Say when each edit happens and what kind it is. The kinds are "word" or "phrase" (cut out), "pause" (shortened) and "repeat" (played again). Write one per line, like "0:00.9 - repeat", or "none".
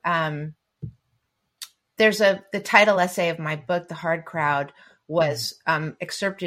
none